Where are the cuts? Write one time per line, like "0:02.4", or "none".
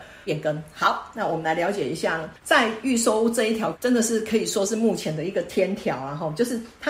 0:02.4